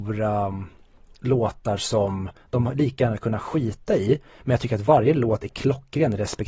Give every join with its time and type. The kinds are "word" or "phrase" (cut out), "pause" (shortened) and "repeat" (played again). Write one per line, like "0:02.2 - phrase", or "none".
none